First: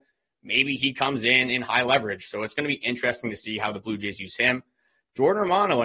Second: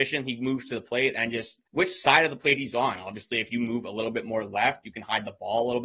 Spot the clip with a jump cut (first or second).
second